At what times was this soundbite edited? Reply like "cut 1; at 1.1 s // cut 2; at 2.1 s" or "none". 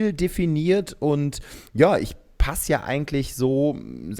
none